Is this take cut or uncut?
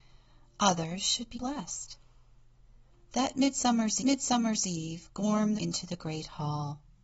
cut